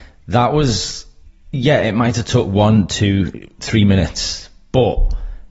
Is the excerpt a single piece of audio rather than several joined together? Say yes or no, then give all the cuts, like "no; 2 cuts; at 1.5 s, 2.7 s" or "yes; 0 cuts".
yes; 0 cuts